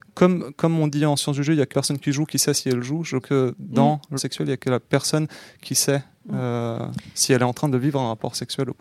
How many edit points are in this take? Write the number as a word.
three